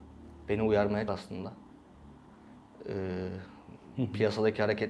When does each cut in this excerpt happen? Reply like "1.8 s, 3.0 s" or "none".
1.1 s

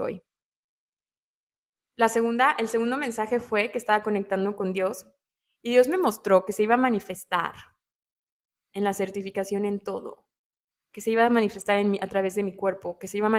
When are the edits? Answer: none

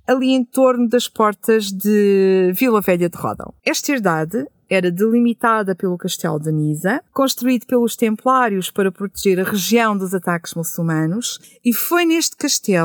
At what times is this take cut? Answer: 3.6 s, 7.1 s

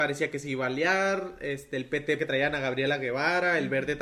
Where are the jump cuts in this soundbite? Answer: 2.2 s

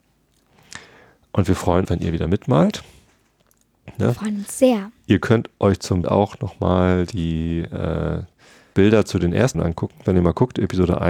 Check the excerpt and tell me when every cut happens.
1.8 s, 6.0 s, 8.7 s, 9.5 s

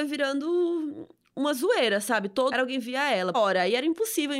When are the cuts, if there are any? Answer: 2.5 s, 3.3 s

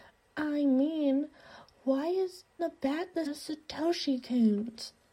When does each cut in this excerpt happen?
2.6 s, 3.3 s

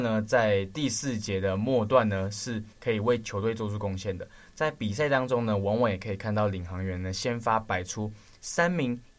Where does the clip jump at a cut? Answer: 2.7 s

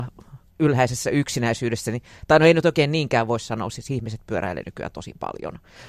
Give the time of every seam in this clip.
none

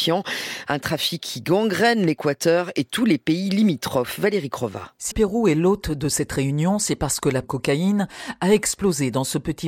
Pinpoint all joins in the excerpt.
5.1 s, 7.4 s

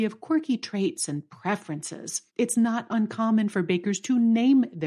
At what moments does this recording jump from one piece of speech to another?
2.3 s

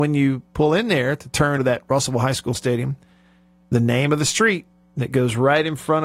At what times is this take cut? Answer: 1.6 s, 2.5 s

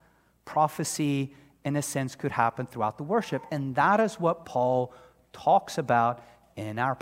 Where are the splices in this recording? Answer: none

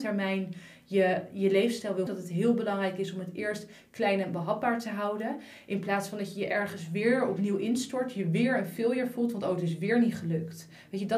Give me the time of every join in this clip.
2.1 s

